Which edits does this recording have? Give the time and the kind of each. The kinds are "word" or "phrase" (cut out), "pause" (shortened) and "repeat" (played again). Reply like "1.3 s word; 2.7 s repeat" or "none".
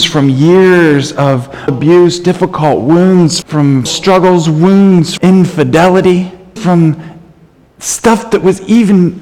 1.7 s word; 3.4 s word; 3.9 s word; 5.2 s word; 6.6 s word

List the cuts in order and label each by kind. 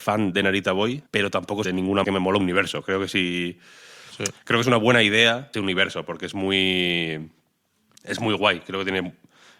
1.1 s pause; 1.6 s phrase; 2.0 s phrase; 2.4 s phrase; 5.5 s phrase

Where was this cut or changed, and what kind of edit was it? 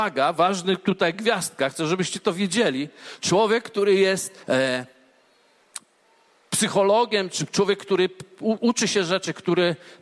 4.4 s pause

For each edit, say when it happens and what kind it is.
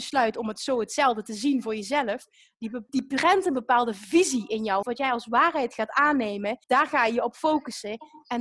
2.9 s word; 4.8 s word; 6.6 s pause

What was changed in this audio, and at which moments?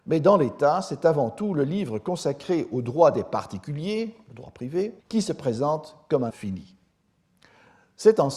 5.0 s pause; 6.3 s word

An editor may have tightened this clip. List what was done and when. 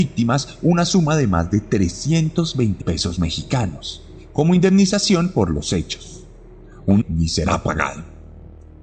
2.8 s word; 7.0 s phrase

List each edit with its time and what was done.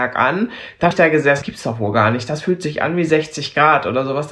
0.9 s word; 1.4 s phrase

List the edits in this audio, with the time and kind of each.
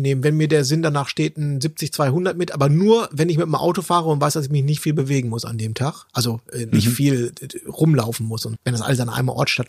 8.6 s word

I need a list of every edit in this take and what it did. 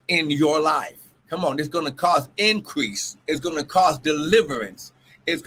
1.2 s pause; 3.2 s pause

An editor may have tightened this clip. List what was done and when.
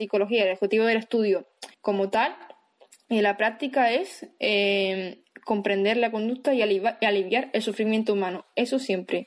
1.7 s pause

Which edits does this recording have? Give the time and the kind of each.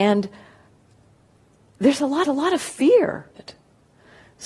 2.2 s repeat; 3.4 s word

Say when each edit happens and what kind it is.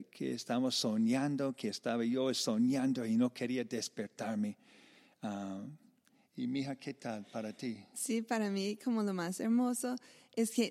none

